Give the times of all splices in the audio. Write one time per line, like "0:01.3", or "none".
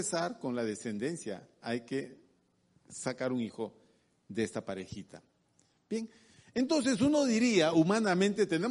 none